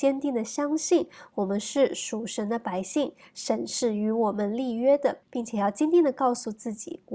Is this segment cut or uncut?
cut